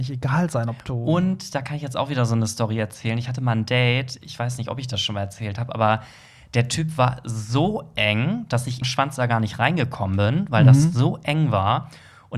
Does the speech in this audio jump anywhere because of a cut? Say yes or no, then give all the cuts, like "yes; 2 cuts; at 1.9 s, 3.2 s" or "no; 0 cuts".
yes; 1 cut; at 8.8 s